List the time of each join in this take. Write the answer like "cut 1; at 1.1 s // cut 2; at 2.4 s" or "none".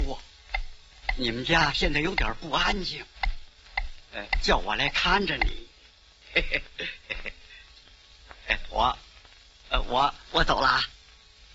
cut 1; at 7.0 s